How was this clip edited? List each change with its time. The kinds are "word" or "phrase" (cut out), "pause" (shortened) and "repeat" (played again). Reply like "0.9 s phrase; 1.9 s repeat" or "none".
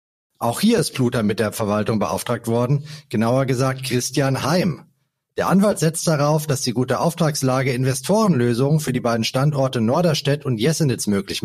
none

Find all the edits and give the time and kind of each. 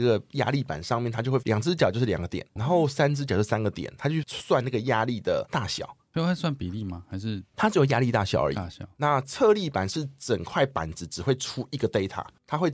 2.6 s word

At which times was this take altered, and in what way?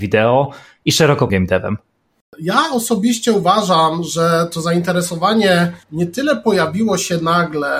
1.3 s word; 5.8 s pause

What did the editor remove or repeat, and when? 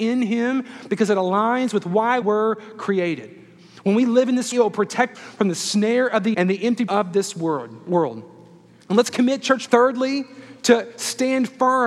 2.2 s word; 4.5 s word; 5.1 s word; 6.3 s word; 6.9 s word; 9.7 s word

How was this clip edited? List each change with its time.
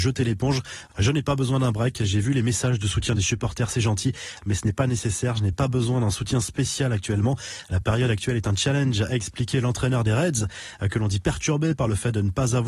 none

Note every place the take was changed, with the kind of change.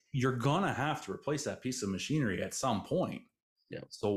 none

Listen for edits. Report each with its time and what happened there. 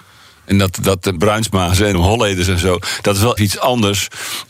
1.1 s phrase; 1.9 s phrase; 3.4 s word

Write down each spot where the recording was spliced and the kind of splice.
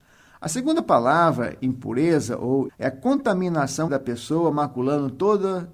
2.7 s word; 3.9 s word

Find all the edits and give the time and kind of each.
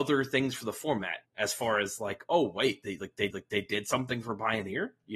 1.2 s pause; 3.3 s repeat

